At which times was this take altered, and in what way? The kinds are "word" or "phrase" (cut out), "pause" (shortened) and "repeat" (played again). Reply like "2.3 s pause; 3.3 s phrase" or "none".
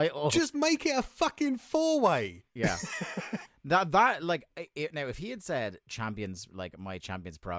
2.5 s pause